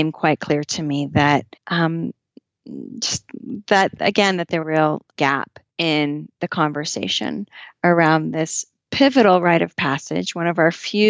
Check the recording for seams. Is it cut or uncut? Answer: cut